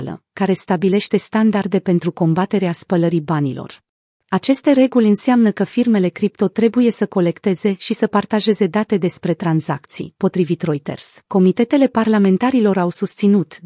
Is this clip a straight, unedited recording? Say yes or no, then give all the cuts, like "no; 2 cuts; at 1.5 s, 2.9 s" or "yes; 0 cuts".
no; 2 cuts; at 4.2 s, 11.2 s